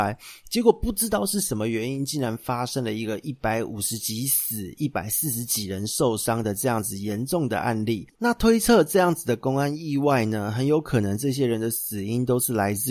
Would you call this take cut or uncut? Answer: cut